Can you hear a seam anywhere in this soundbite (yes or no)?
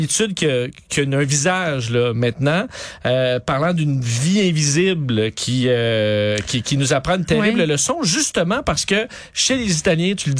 no